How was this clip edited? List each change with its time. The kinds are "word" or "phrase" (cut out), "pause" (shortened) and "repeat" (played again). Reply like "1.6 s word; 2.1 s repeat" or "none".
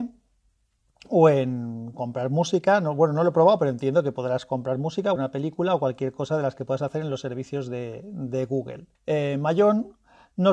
5.2 s word; 8.9 s pause